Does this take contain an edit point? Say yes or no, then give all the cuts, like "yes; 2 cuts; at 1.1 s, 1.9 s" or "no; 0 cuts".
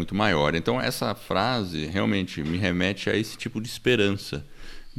no; 0 cuts